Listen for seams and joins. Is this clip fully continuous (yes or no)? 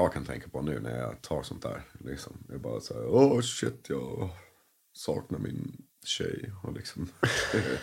yes